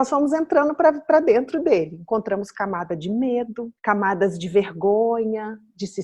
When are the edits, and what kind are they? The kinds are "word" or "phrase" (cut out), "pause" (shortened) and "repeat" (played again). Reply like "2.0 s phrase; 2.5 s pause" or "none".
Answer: 3.8 s pause